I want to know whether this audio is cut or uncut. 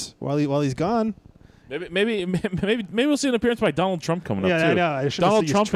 uncut